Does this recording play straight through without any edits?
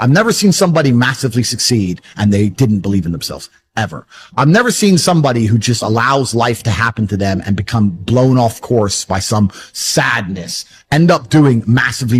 yes; 0 cuts

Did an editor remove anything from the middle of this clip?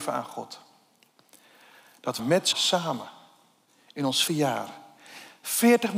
yes; 3 cuts; at 2.2 s, 2.5 s, 4.3 s

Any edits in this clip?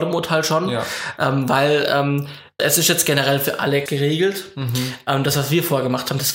yes; 2 cuts; at 2.6 s, 3.9 s

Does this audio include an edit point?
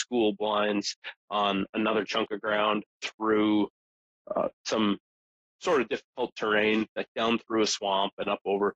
no; 0 cuts

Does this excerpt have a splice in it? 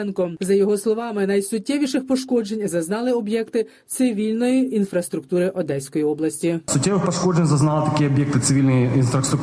no; 0 cuts

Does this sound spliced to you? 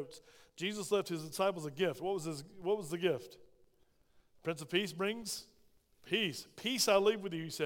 no; 0 cuts

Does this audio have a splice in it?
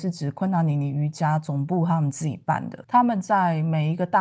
no; 0 cuts

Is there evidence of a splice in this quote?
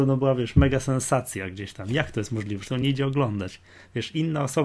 no; 0 cuts

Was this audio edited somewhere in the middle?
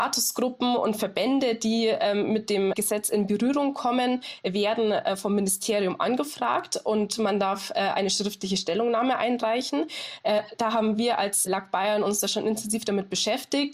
yes; 2 cuts; at 2.7 s, 11.5 s

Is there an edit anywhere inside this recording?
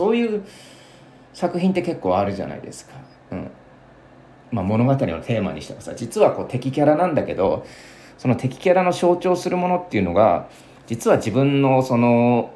no; 0 cuts

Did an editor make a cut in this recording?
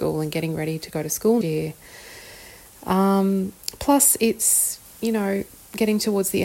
yes; 1 cut; at 1.4 s

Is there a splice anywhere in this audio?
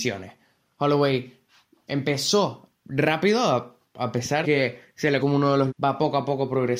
yes; 4 cuts; at 2.8 s, 4.4 s, 5.2 s, 5.7 s

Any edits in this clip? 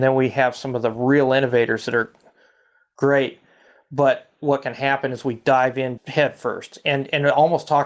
yes; 1 cut; at 6.0 s

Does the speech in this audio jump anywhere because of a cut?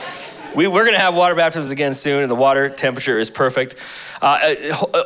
no; 0 cuts

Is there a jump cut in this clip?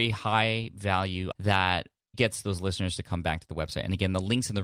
yes; 2 cuts; at 1.3 s, 2.1 s

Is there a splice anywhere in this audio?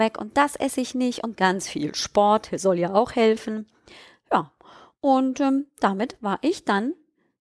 no; 0 cuts

